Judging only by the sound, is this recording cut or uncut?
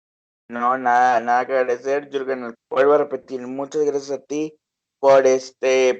cut